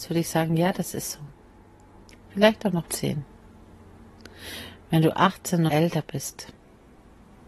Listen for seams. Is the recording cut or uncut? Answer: cut